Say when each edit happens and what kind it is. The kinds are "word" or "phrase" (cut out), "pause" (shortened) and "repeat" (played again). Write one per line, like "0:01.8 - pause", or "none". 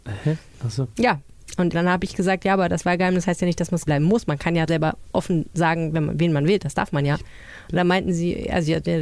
0:01.7 - word
0:03.9 - word
0:04.7 - word